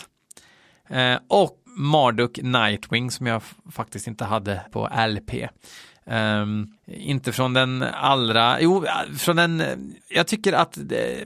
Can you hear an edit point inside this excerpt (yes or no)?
yes